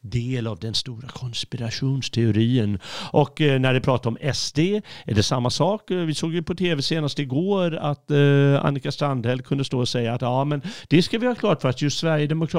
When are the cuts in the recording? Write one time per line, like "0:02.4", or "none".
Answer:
none